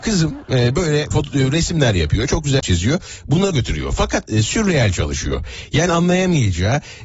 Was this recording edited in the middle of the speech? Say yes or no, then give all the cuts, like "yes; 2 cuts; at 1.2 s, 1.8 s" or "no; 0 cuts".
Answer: yes; 5 cuts; at 1.1 s, 2.6 s, 3.5 s, 4.3 s, 5.9 s